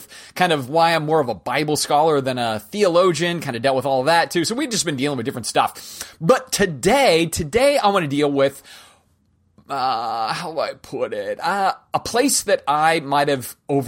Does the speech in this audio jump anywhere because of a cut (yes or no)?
no